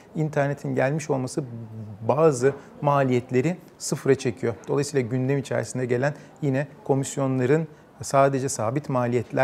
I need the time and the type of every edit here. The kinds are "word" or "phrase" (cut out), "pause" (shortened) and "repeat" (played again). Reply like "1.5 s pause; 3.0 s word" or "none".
none